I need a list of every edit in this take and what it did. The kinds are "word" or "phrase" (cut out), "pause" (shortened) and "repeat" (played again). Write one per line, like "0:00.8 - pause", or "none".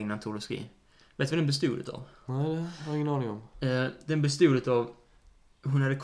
none